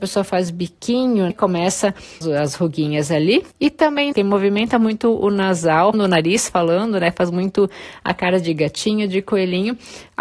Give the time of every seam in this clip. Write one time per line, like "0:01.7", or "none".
0:01.3
0:02.2
0:03.5
0:04.1
0:05.9